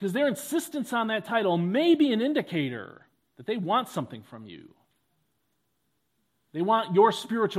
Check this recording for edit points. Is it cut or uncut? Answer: cut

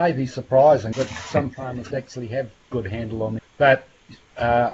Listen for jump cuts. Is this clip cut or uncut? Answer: cut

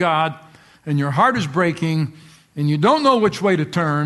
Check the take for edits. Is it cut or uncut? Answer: uncut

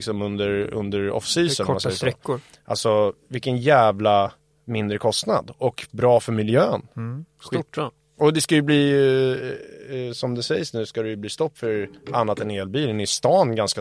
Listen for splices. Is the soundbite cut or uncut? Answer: uncut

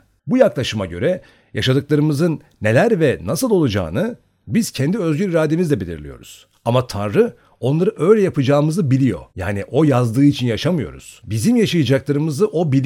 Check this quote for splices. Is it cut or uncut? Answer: cut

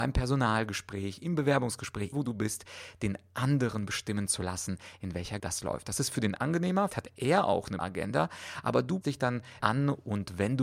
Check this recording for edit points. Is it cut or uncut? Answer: cut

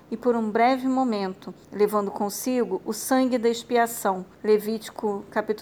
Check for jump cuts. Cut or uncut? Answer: cut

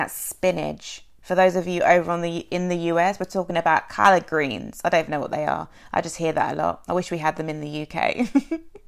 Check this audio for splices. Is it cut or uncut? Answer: uncut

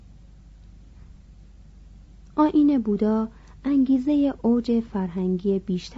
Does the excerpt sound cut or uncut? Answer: uncut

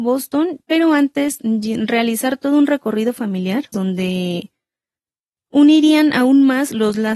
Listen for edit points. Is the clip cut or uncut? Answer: cut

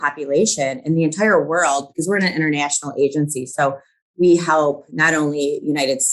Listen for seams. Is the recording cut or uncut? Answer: uncut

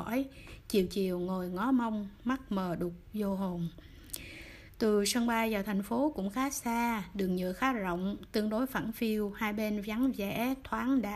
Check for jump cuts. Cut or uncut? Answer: uncut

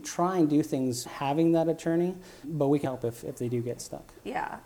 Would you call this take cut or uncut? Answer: cut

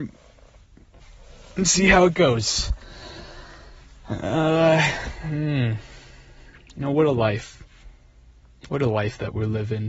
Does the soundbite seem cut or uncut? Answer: uncut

